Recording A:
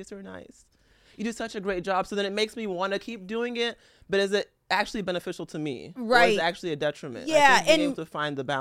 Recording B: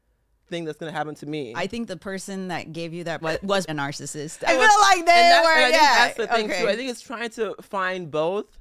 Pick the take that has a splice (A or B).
B